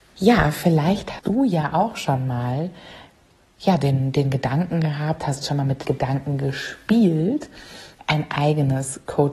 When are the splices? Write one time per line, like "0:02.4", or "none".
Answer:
0:01.2
0:05.8